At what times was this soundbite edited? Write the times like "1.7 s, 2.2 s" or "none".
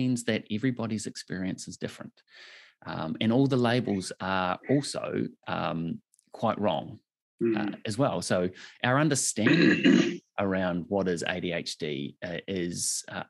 none